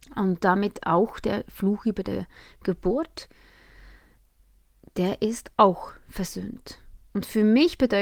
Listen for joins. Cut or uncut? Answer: uncut